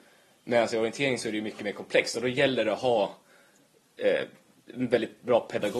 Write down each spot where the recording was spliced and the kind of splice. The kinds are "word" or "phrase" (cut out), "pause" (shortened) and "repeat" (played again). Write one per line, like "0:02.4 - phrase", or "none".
none

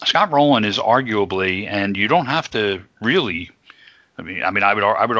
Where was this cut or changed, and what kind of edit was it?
none

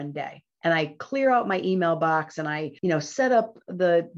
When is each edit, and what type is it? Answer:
0:02.8 - pause

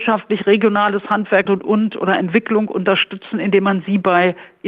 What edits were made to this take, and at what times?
0:01.5 - word

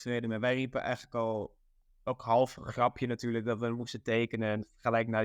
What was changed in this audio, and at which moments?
none

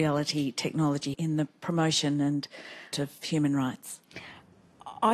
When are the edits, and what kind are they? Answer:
0:01.1 - word
0:02.9 - word

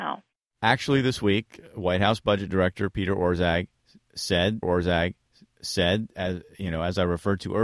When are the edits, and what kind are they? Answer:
0:04.6 - repeat

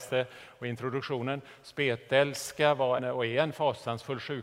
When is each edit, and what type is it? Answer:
0:03.0 - word

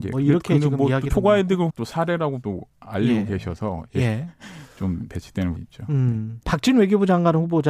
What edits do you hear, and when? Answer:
0:01.1 - word
0:01.7 - word
0:02.4 - word
0:05.6 - word
0:06.4 - pause

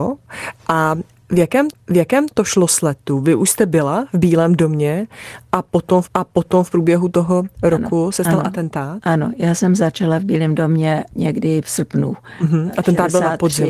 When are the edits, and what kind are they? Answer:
0:01.7 - repeat
0:06.1 - repeat
0:11.6 - word

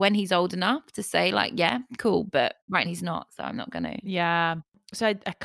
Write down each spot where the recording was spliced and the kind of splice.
0:02.8 - word

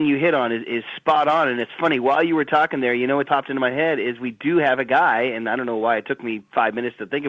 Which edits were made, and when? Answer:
0:03.2 - word

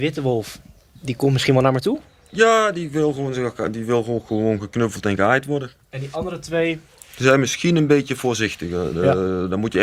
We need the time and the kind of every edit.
none

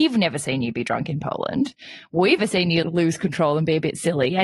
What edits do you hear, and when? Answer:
0:02.4 - word
0:02.8 - word

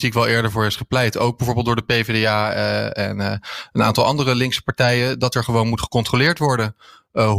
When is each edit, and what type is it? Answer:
none

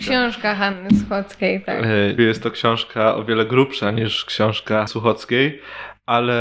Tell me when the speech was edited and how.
0:02.2 - word
0:04.9 - word

